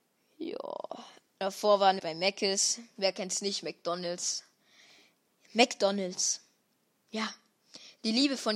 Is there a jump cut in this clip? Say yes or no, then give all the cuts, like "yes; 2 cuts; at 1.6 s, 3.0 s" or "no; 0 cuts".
yes; 1 cut; at 2.0 s